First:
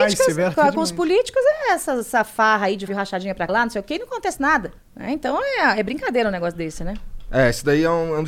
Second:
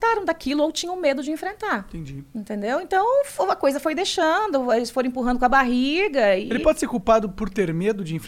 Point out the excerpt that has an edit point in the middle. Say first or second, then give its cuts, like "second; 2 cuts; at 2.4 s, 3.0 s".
first; 3 cuts; at 2.9 s, 3.5 s, 4.8 s